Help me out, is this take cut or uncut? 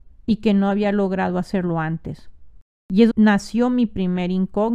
cut